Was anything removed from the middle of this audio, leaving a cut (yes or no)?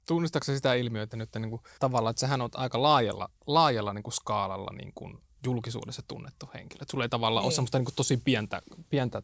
yes